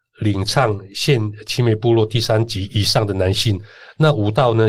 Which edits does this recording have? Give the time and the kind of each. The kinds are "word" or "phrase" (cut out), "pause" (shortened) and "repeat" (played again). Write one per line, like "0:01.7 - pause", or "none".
none

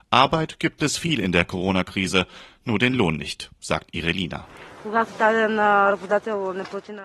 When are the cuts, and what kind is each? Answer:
none

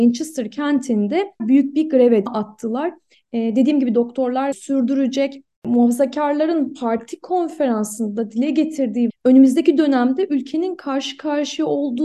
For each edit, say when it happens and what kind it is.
0:01.4 - word
0:02.3 - phrase
0:04.5 - word
0:09.1 - word

